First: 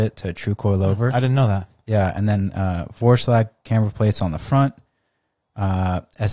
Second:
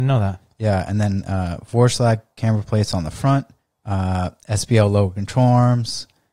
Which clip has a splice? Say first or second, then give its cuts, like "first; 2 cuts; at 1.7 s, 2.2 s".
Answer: second; 1 cut; at 3.6 s